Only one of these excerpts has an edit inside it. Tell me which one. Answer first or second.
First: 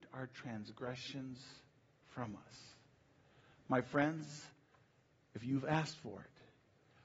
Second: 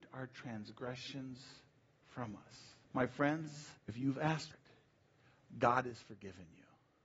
second